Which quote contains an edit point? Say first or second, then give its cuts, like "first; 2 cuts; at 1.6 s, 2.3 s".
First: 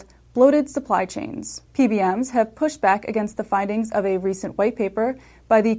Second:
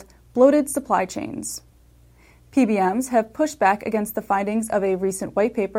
first; 1 cut; at 1.7 s